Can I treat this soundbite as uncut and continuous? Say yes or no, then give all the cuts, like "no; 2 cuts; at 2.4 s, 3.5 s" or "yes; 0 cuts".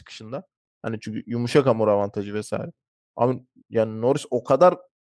yes; 0 cuts